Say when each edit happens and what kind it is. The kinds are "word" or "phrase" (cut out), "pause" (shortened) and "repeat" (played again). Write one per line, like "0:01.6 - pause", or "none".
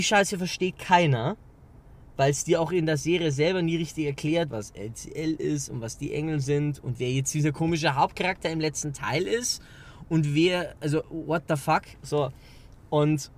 0:04.5 - word